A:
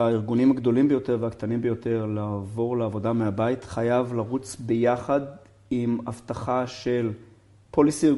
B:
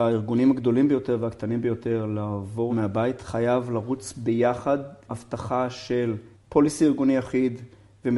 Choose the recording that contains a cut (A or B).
B